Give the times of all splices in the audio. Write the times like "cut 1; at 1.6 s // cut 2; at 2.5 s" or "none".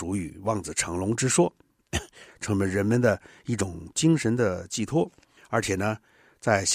cut 1; at 5.4 s

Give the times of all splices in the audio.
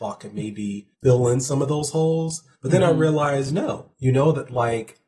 cut 1; at 0.9 s // cut 2; at 2.6 s // cut 3; at 3.9 s

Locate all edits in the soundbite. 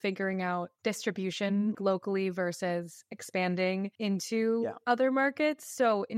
cut 1; at 1.7 s

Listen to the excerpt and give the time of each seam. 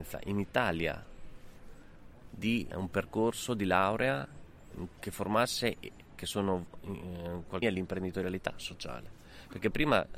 cut 1; at 2.7 s // cut 2; at 6.2 s // cut 3; at 7.6 s

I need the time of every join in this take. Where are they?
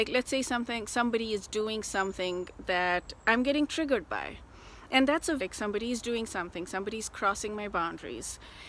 cut 1; at 5.4 s

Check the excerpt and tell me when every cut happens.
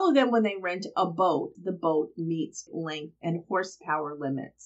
cut 1; at 1.5 s // cut 2; at 2.7 s

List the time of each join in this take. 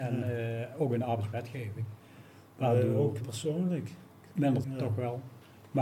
cut 1; at 3.2 s // cut 2; at 4.6 s

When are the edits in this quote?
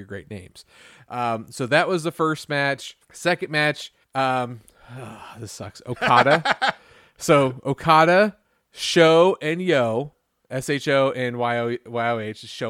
cut 1; at 3.0 s // cut 2; at 4.0 s // cut 3; at 10.4 s

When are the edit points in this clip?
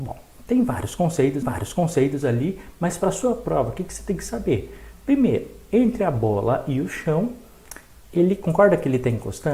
cut 1; at 1.4 s

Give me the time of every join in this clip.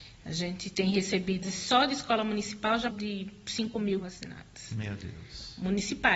cut 1; at 1.4 s // cut 2; at 2.9 s // cut 3; at 4.0 s

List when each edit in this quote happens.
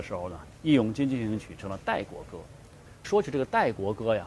cut 1; at 3.0 s

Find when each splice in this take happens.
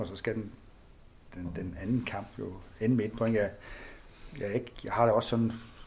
none

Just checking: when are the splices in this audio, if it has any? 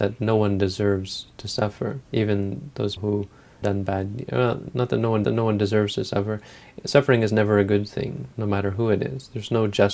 cut 1; at 2.1 s // cut 2; at 3.0 s // cut 3; at 3.6 s // cut 4; at 5.2 s // cut 5; at 8.3 s

